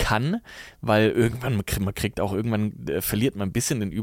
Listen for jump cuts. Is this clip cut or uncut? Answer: uncut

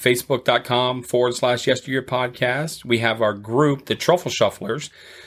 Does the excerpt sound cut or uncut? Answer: uncut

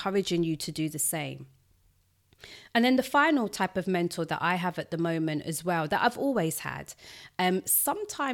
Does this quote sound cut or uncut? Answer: uncut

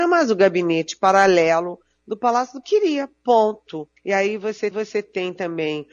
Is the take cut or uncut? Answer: cut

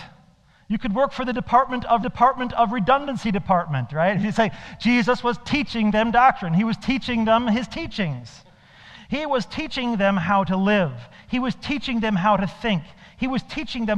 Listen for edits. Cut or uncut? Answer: cut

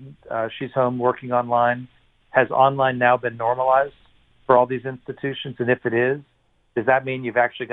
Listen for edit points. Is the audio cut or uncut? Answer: uncut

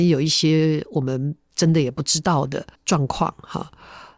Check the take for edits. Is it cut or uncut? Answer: cut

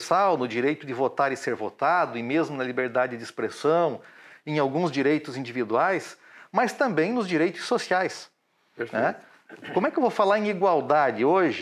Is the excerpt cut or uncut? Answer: uncut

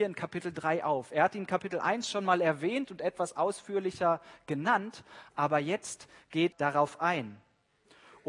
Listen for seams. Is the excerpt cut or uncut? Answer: cut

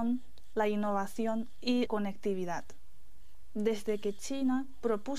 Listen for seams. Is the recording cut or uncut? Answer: cut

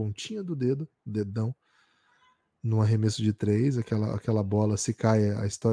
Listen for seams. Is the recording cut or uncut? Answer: uncut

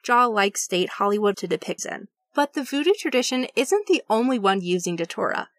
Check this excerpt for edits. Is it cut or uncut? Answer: cut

